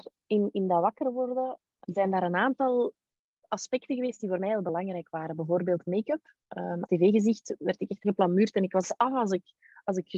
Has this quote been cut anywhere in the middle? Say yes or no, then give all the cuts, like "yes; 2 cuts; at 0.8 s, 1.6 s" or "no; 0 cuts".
yes; 4 cuts; at 1.8 s, 6.9 s, 8.0 s, 8.8 s